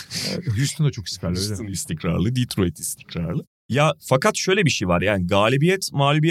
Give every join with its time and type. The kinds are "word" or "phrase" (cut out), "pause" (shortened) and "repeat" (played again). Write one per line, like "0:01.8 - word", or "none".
none

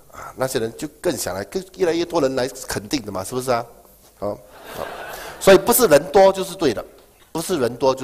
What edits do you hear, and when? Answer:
none

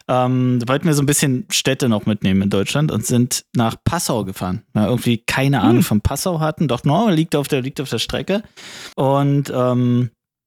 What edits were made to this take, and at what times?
0:08.9 - pause

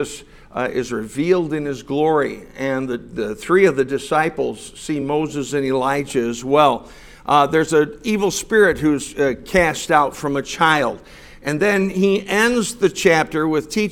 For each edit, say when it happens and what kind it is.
none

